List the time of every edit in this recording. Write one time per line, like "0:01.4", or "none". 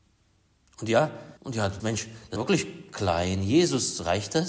0:01.4
0:01.8
0:02.4